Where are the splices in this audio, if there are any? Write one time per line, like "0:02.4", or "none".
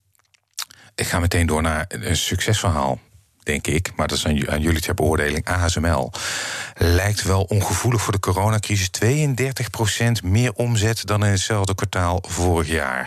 none